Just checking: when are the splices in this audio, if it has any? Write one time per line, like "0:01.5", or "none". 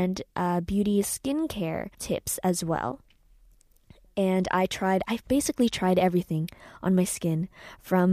0:01.9